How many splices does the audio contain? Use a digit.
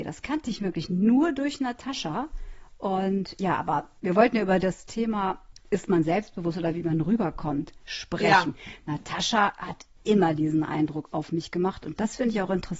2